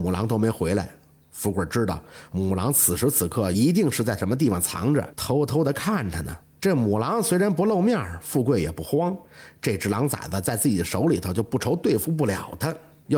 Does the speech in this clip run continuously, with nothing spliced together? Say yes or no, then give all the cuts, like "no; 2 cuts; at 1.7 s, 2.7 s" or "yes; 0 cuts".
yes; 0 cuts